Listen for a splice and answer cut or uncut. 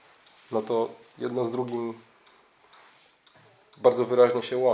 uncut